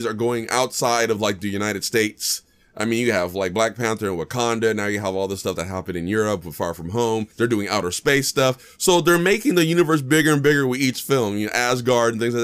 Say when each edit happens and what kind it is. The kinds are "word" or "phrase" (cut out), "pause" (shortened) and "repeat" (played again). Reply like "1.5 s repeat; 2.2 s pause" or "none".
7.3 s pause